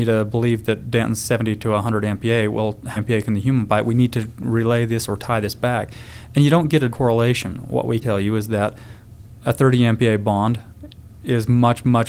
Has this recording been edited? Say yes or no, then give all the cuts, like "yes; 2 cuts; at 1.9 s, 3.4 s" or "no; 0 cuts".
yes; 3 cuts; at 3.0 s, 6.9 s, 8.0 s